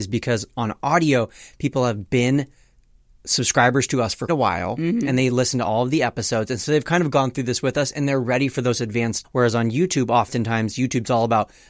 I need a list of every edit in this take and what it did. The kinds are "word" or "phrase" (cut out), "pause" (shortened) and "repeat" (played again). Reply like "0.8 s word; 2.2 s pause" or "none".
4.3 s word; 9.2 s word